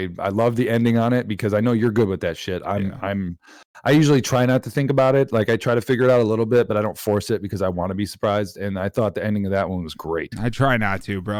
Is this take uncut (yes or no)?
yes